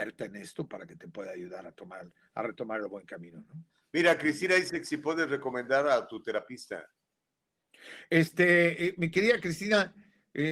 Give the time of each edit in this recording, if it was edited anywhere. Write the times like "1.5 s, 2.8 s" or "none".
3.7 s